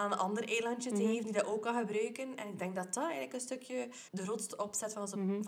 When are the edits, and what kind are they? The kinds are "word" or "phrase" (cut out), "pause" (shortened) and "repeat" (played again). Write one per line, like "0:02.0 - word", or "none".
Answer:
0:04.1 - pause